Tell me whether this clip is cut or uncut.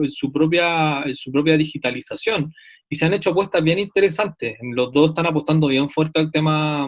uncut